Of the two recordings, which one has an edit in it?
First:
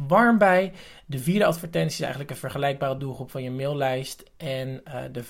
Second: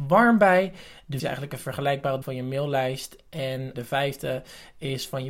second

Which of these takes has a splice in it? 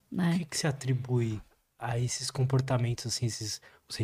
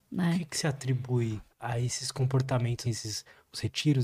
second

